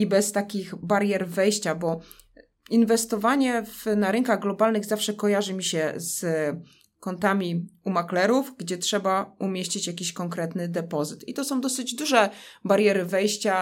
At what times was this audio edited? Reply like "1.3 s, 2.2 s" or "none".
none